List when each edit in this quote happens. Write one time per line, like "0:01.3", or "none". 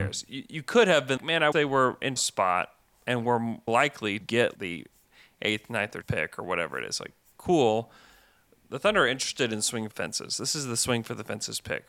0:01.2
0:01.5
0:02.2
0:03.7
0:04.2
0:04.5
0:06.0
0:09.9